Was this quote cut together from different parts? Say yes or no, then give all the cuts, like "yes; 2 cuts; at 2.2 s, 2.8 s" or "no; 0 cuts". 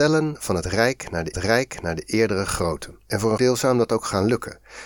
yes; 3 cuts; at 1.3 s, 3.1 s, 3.4 s